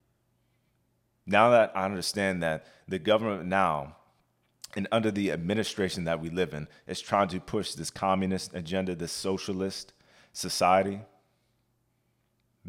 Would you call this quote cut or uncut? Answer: uncut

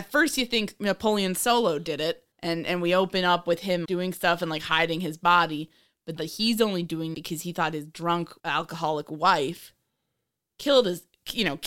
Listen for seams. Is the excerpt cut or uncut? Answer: cut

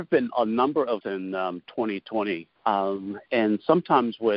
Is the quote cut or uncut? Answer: cut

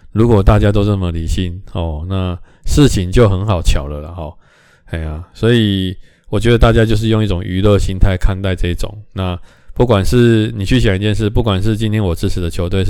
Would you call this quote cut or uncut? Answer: uncut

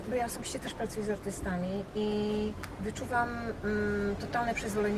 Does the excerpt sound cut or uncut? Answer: uncut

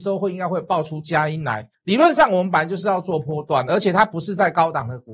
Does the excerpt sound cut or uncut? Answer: cut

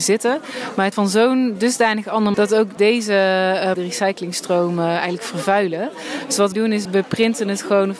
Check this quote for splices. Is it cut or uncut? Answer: cut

